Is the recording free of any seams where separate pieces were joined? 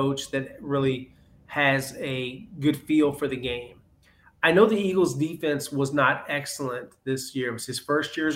yes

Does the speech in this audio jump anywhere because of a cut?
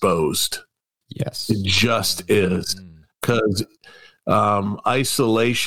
no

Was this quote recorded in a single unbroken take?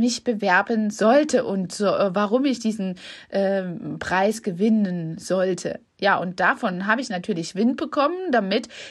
yes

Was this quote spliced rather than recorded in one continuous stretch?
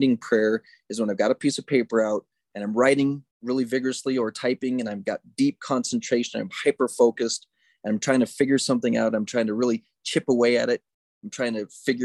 yes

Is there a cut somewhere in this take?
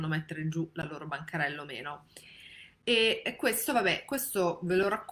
no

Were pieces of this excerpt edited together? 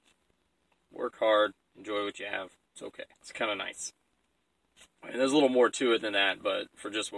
yes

